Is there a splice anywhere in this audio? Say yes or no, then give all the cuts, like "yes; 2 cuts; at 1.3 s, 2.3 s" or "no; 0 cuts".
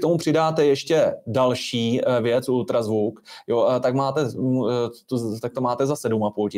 no; 0 cuts